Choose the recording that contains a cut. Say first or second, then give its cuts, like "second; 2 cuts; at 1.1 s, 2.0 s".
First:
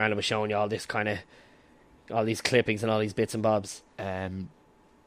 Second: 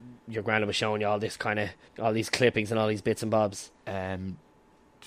second; 1 cut; at 1.9 s